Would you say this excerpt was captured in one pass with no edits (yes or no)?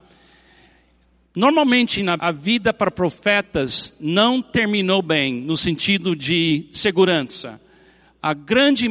no